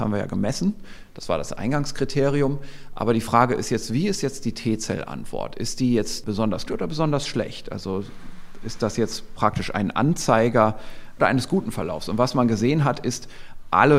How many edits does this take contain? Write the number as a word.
two